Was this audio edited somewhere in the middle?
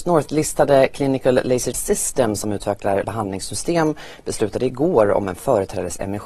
yes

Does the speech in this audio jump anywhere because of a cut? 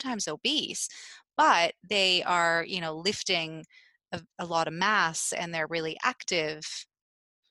no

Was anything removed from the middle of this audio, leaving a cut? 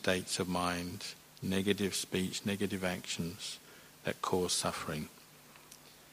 yes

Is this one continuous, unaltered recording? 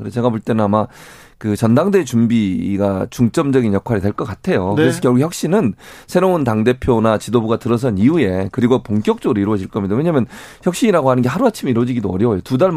yes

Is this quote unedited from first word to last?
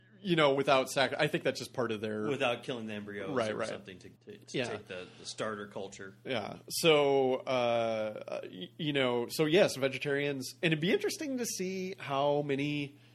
no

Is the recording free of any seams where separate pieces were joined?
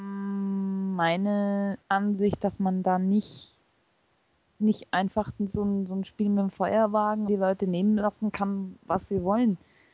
no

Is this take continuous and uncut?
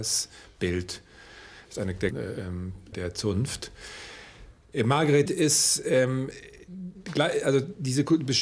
no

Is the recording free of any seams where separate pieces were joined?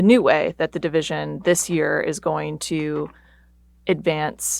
yes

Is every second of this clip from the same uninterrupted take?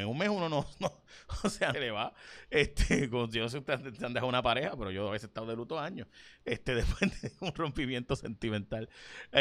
no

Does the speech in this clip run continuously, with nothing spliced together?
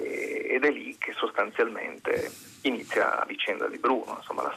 no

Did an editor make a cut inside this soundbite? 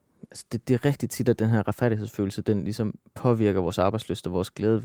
yes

